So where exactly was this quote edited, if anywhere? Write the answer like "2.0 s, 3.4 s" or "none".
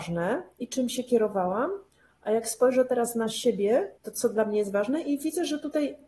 4.0 s